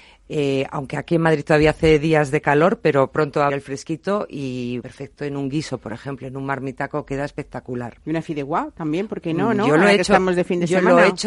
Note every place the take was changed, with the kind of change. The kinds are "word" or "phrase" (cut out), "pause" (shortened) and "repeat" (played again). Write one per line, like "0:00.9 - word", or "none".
0:03.5 - word
0:04.8 - word